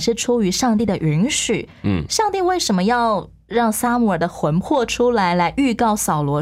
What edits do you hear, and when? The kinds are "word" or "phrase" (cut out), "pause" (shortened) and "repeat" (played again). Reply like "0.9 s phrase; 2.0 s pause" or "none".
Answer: none